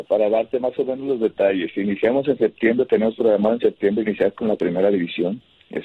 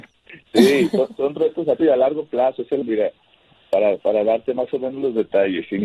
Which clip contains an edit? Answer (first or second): second